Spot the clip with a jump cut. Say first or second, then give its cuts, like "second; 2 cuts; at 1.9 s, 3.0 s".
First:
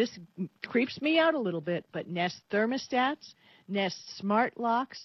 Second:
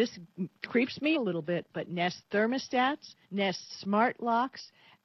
second; 2 cuts; at 1.1 s, 3.2 s